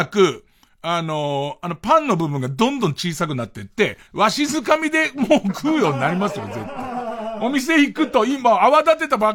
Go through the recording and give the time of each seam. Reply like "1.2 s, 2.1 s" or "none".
4.1 s